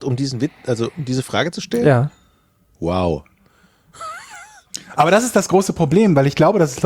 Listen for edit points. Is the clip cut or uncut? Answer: uncut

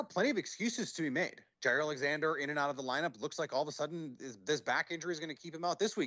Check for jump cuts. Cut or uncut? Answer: cut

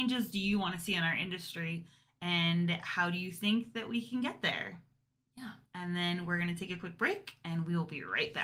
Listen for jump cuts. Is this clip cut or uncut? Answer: cut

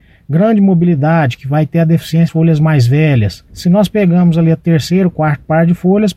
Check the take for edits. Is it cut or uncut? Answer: cut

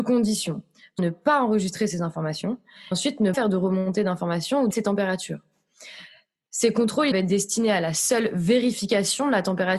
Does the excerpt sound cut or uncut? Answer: cut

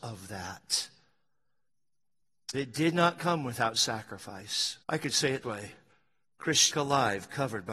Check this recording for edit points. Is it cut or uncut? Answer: cut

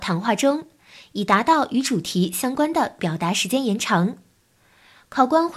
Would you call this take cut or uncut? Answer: uncut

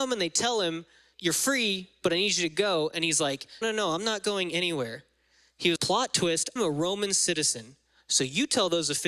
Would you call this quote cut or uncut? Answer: cut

